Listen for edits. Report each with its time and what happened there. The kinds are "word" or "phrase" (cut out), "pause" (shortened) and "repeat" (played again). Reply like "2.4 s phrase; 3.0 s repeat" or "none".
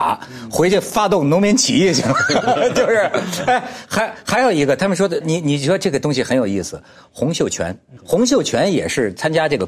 5.2 s word; 8.0 s word